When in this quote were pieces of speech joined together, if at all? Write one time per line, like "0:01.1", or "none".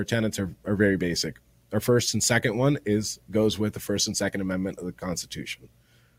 none